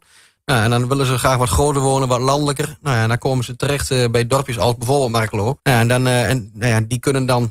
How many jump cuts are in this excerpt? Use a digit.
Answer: 1